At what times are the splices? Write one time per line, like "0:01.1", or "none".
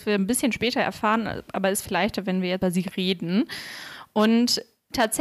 0:01.9
0:02.6

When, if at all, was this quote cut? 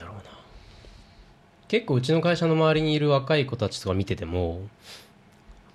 none

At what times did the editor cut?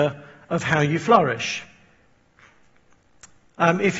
none

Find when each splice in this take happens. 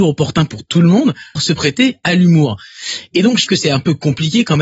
0:01.4
0:03.5

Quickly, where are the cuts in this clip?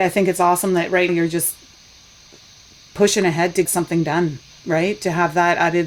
0:01.1
0:03.7

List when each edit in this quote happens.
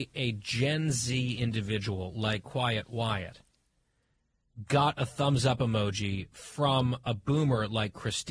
none

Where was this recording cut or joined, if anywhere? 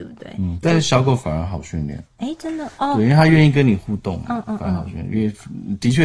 0:02.1

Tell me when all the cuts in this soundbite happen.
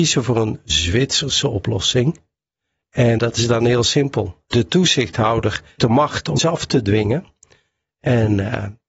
0:03.2
0:05.8
0:06.4

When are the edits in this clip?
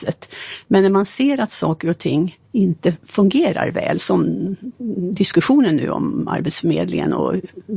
0:02.4

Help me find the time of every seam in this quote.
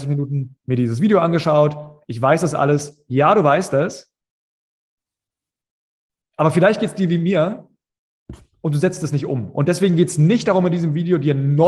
none

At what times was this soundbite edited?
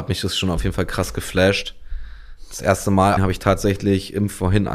0:03.2

